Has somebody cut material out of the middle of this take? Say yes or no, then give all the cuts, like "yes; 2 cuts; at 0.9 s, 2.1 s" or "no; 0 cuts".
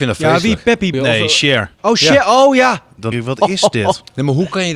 yes; 3 cuts; at 0.9 s, 1.7 s, 3.1 s